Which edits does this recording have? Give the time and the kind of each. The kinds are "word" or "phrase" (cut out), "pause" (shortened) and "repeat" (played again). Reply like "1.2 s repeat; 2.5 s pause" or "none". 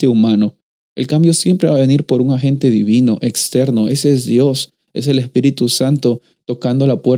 none